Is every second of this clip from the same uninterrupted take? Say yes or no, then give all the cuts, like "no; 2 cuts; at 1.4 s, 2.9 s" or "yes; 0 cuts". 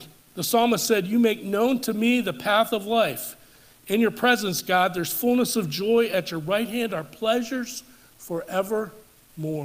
yes; 0 cuts